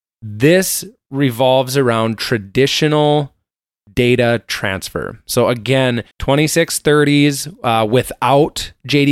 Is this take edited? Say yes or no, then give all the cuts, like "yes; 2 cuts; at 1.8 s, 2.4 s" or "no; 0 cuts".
yes; 1 cut; at 6.1 s